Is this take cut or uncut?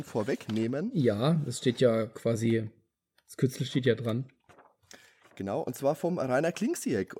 uncut